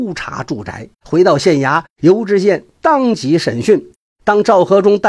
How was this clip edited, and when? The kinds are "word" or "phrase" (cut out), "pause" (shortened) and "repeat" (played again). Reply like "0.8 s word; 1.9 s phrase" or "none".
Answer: 0.9 s pause